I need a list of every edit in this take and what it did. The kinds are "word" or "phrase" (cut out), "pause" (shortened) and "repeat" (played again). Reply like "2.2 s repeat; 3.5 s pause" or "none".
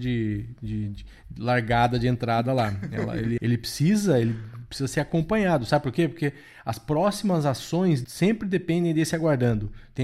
3.4 s word; 8.0 s word